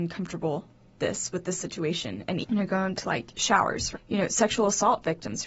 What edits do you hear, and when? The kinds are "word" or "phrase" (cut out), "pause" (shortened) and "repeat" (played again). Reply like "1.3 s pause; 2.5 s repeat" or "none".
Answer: 1.0 s word; 2.4 s word; 2.9 s word; 3.9 s word